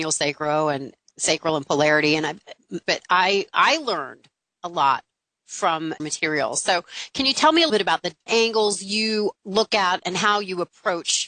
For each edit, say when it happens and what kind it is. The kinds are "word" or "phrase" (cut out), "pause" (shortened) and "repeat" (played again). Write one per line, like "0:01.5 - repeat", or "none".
0:02.8 - word
0:06.0 - word
0:07.7 - word
0:08.3 - word
0:09.3 - word